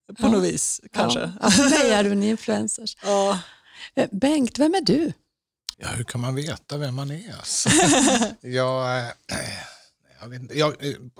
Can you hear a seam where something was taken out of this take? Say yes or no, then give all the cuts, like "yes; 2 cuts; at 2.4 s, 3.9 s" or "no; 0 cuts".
yes; 1 cut; at 5.7 s